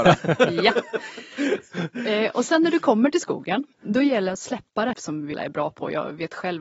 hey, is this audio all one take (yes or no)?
no